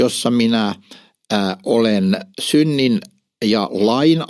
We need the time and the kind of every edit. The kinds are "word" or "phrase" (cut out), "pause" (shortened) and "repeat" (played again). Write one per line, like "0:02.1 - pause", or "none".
0:02.3 - word